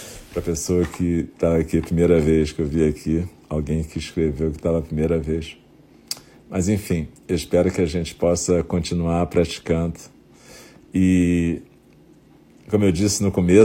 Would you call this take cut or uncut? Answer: uncut